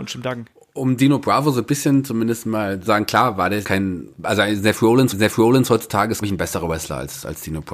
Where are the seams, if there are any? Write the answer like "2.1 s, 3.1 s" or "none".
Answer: 2.9 s, 3.6 s, 4.1 s, 5.1 s, 6.2 s